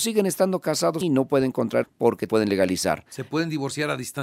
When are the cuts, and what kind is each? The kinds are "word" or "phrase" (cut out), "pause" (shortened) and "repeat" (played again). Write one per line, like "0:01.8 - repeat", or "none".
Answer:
0:01.0 - word
0:01.8 - word
0:02.3 - phrase